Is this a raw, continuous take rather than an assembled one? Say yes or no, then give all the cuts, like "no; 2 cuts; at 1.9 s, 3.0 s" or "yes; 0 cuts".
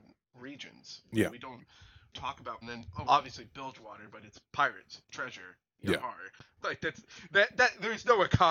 no; 4 cuts; at 2.1 s, 2.6 s, 3.1 s, 6.6 s